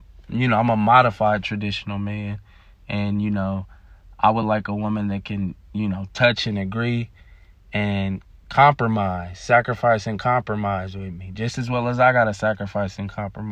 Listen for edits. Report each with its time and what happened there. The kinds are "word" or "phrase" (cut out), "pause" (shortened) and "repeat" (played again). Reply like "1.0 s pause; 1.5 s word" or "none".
none